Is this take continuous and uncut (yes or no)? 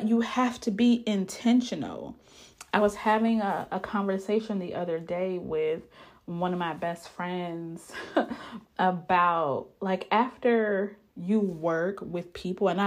yes